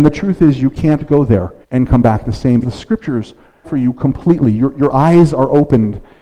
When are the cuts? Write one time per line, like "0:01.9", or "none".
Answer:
0:01.6
0:02.6
0:03.6